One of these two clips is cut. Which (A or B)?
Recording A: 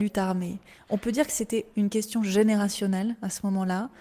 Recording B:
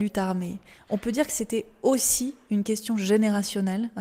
A